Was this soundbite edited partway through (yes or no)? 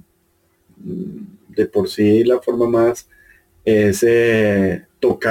no